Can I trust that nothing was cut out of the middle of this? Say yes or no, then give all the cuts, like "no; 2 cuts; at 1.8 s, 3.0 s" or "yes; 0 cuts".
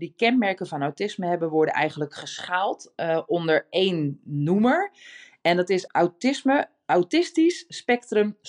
no; 1 cut; at 5.9 s